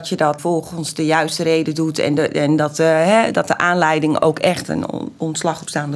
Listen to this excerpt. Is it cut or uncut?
uncut